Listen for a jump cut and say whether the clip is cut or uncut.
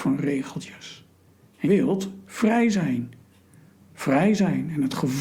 cut